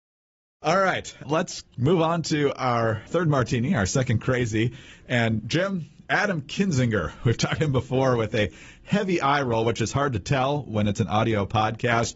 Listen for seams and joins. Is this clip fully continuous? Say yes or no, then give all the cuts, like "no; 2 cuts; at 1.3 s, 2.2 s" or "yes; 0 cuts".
no; 4 cuts; at 1.2 s, 3.1 s, 5.4 s, 7.6 s